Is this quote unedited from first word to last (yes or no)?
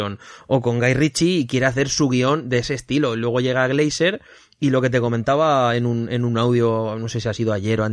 yes